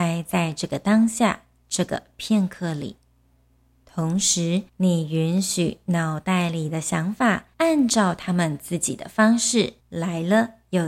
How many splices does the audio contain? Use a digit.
4